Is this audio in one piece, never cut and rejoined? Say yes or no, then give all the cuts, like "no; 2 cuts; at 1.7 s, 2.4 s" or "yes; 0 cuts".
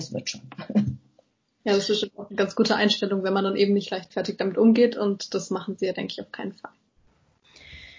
yes; 0 cuts